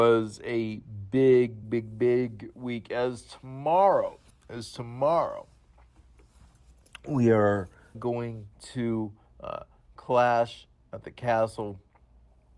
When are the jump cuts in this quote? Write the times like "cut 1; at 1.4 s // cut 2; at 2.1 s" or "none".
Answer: cut 1; at 1.6 s // cut 2; at 4.3 s // cut 3; at 7.9 s // cut 4; at 8.5 s